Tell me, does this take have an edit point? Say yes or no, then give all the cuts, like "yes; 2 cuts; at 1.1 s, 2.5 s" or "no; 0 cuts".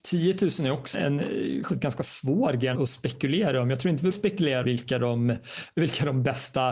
yes; 5 cuts; at 0.9 s, 1.7 s, 2.7 s, 4.1 s, 4.6 s